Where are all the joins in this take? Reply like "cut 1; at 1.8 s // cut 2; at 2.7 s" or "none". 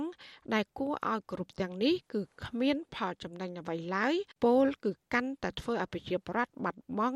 cut 1; at 4.4 s